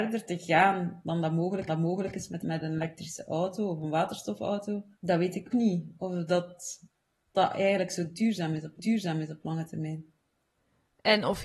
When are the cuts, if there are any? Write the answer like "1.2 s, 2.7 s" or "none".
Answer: 1.7 s, 2.4 s, 4.9 s, 5.5 s, 7.3 s, 8.8 s